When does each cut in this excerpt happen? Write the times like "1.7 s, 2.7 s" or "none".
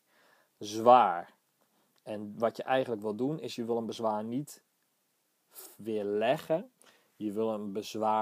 none